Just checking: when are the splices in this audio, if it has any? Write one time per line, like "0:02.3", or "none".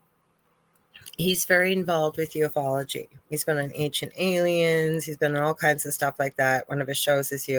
0:03.2